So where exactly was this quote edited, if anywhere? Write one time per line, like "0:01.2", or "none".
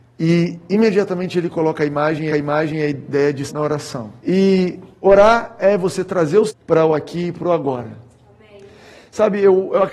0:02.3
0:03.5
0:04.2
0:06.5